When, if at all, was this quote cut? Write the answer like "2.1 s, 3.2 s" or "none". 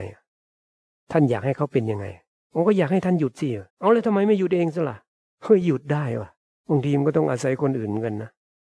3.7 s, 6.4 s